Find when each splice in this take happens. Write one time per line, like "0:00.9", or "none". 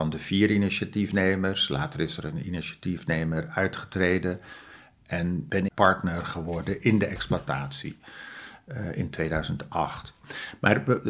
0:05.7